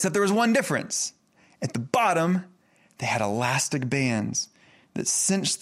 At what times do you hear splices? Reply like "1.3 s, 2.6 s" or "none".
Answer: none